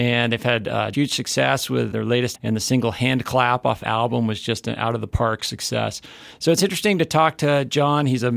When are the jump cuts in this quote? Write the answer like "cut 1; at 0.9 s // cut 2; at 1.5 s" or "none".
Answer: cut 1; at 0.9 s // cut 2; at 1.9 s // cut 3; at 2.3 s // cut 4; at 3.8 s